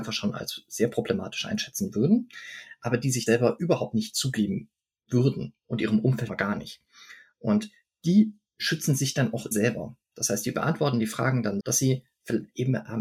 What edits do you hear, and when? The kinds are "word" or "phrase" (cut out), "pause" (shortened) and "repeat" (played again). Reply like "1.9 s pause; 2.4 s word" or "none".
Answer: 3.3 s word; 6.3 s word; 9.5 s word; 11.6 s word